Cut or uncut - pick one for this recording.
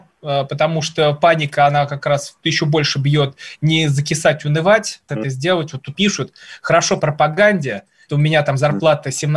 cut